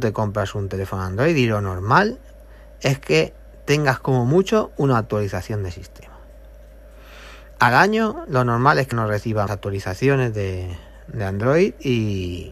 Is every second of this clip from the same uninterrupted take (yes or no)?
no